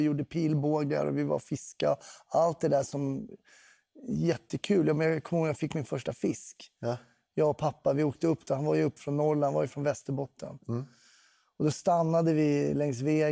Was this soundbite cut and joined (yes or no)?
yes